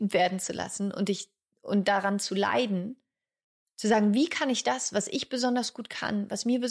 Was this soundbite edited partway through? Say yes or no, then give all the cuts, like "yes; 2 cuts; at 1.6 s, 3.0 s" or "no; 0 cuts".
no; 0 cuts